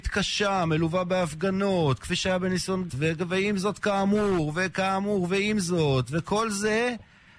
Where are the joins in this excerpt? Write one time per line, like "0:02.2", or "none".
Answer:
0:02.9